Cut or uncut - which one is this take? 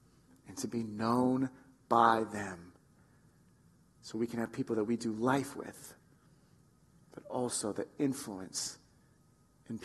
uncut